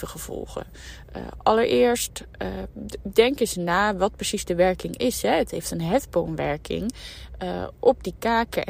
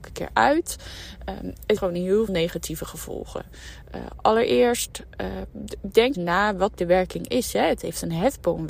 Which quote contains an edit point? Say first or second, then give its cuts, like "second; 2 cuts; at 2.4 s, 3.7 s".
second; 4 cuts; at 1.8 s, 2.3 s, 6.1 s, 6.8 s